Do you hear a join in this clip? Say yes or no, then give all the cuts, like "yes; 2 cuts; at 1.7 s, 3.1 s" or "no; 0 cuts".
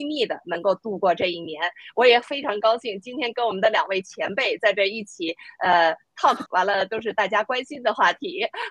yes; 1 cut; at 6.5 s